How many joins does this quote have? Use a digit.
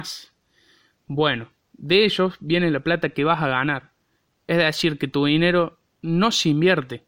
0